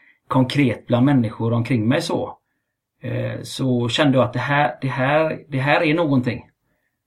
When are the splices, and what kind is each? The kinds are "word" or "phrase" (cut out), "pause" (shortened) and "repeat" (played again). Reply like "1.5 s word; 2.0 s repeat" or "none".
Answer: none